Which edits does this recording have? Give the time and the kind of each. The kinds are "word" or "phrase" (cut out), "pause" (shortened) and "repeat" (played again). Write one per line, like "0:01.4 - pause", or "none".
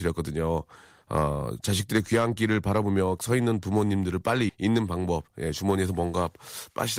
0:03.2 - word
0:04.5 - word